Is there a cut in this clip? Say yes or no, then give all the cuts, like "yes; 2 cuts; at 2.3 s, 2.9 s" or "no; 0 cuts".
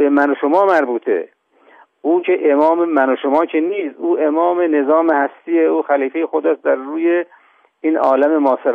no; 0 cuts